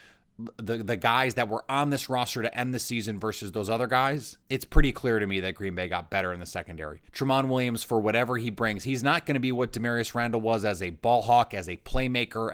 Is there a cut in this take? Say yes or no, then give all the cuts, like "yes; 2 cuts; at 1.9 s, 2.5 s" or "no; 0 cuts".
yes; 2 cuts; at 4.4 s, 7.1 s